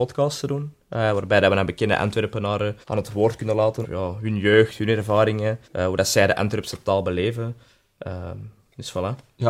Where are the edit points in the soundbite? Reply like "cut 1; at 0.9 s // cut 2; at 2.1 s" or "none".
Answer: cut 1; at 2.8 s // cut 2; at 3.8 s // cut 3; at 5.6 s